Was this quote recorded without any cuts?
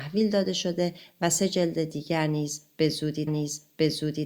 no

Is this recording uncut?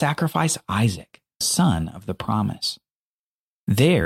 no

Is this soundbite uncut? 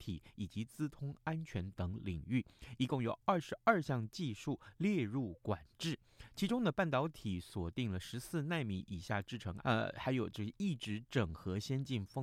no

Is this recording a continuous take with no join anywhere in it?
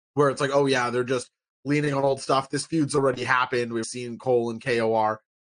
no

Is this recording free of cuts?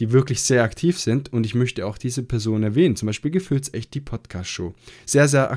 yes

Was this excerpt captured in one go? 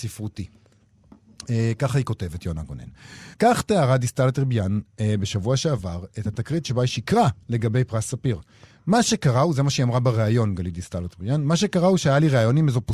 no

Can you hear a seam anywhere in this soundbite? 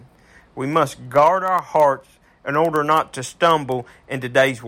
no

